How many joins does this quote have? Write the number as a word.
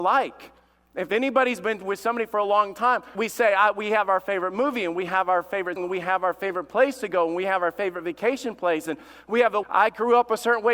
three